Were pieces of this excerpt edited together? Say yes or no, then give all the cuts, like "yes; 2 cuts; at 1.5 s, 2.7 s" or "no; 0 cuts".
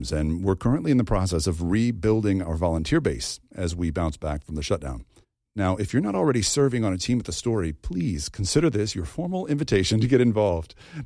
yes; 1 cut; at 5.2 s